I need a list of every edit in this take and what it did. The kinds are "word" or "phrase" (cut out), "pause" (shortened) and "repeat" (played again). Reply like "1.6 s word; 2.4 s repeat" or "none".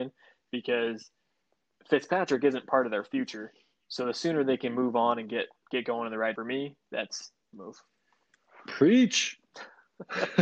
6.4 s phrase; 7.5 s phrase